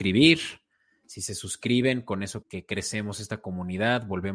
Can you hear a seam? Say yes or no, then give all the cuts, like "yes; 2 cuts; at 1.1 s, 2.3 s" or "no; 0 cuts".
yes; 1 cut; at 2.4 s